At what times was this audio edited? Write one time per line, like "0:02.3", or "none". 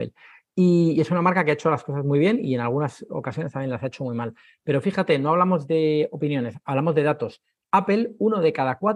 none